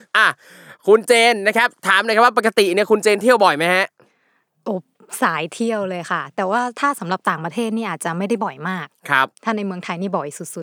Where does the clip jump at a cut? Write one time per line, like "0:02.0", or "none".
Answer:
0:09.3

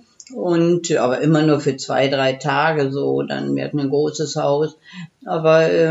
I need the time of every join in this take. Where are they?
none

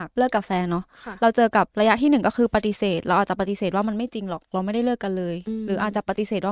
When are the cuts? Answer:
0:01.7

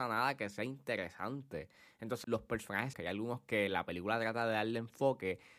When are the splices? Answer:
0:02.2
0:02.9

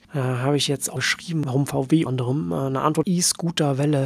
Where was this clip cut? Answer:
0:01.0
0:02.1
0:03.0

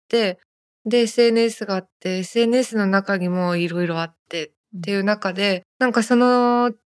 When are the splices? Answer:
0:05.7

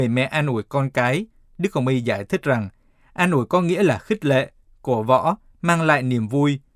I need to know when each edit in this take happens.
none

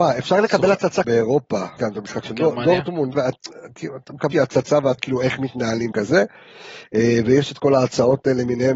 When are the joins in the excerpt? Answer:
0:01.0
0:01.8
0:03.1
0:04.3
0:05.0
0:05.9

